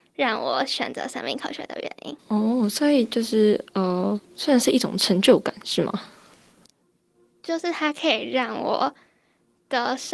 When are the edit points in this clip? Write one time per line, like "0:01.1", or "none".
0:02.2
0:04.2

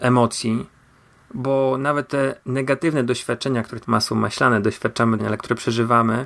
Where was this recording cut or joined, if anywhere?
0:02.4
0:03.8
0:05.2

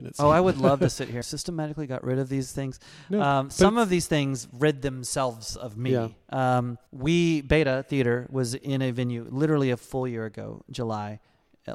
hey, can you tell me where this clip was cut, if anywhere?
0:01.2
0:06.9

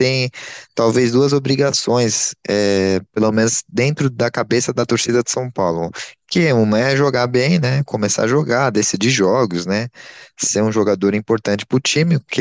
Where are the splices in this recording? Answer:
none

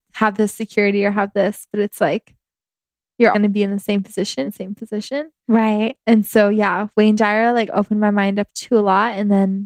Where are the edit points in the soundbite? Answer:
0:03.3
0:04.4

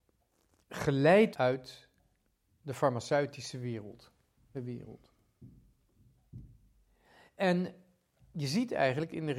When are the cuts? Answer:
0:01.3
0:04.5

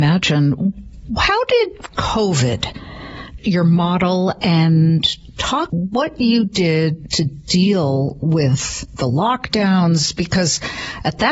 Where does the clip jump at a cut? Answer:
0:03.4
0:05.7

